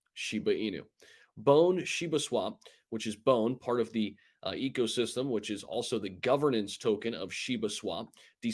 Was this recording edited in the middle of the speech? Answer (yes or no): no